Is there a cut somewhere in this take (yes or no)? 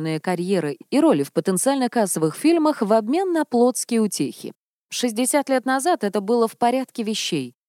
no